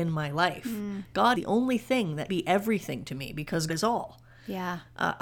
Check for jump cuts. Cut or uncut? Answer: cut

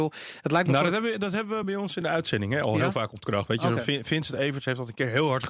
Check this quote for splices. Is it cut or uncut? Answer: uncut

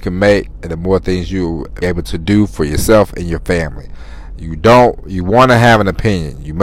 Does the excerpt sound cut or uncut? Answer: cut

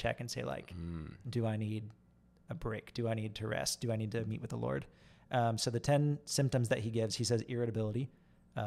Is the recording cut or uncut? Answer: uncut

